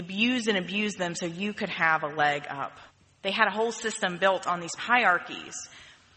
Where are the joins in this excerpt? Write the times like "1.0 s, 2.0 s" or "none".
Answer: 2.9 s, 4.8 s

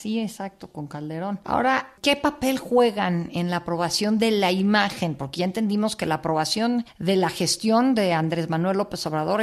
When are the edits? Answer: none

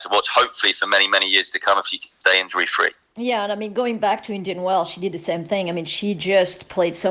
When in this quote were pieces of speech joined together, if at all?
none

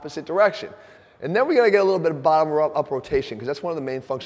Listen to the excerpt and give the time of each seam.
none

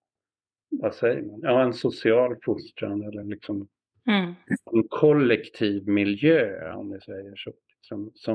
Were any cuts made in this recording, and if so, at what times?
none

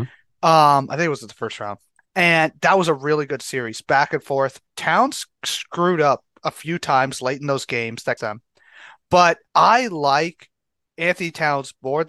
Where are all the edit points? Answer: 2.0 s, 4.7 s, 8.2 s, 9.5 s

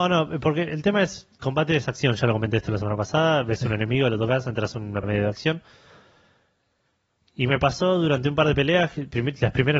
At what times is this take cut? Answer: 1.4 s, 5.0 s

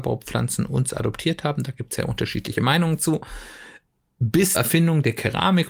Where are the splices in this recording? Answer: 4.5 s

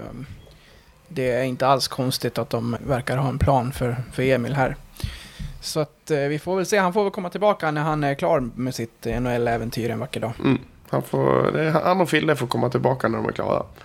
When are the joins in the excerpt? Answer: 2.8 s

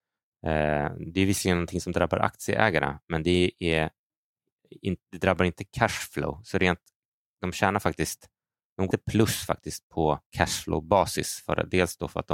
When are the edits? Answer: 8.9 s, 10.3 s

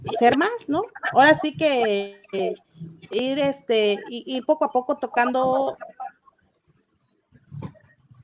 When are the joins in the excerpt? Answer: none

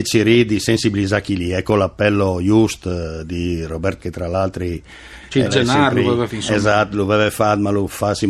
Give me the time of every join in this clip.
4.0 s, 5.5 s, 6.3 s

